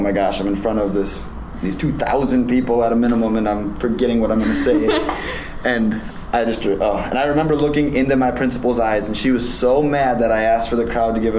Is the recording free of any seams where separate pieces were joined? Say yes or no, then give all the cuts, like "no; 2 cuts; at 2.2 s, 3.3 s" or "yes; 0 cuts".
yes; 0 cuts